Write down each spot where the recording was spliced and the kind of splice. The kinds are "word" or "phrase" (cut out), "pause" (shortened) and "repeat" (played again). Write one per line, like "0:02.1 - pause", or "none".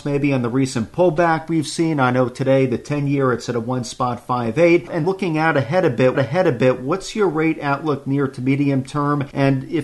0:05.0 - word
0:06.1 - repeat